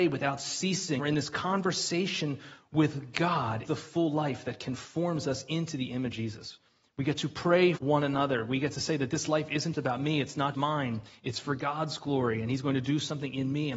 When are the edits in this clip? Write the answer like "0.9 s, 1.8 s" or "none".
1.0 s, 3.6 s, 6.1 s, 7.8 s, 9.7 s, 10.5 s